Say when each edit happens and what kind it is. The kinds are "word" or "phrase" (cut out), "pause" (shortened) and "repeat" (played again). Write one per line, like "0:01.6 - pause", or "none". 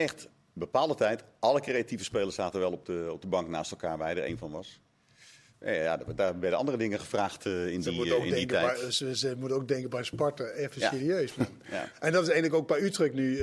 none

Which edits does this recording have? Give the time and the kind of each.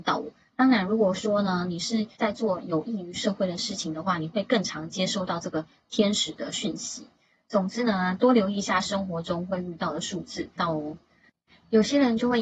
0:02.1 - pause
0:10.6 - phrase

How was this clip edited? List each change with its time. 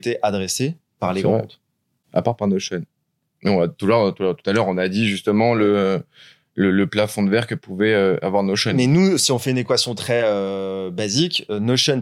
none

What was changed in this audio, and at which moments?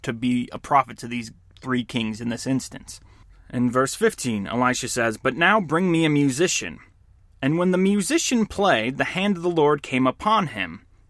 none

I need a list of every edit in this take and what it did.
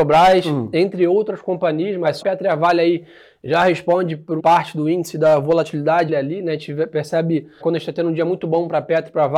0:02.2 - word
0:04.4 - phrase
0:06.1 - phrase
0:07.6 - word

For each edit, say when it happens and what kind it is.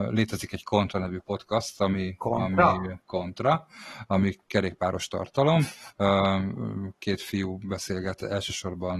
0:03.0 - pause

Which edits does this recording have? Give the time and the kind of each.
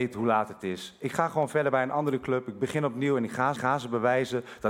0:03.5 - repeat

